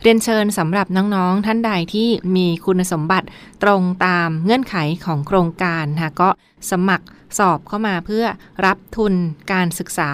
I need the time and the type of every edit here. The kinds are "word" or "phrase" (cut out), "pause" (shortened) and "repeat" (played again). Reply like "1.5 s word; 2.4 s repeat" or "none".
none